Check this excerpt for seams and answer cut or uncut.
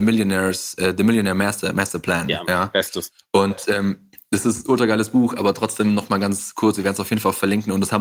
uncut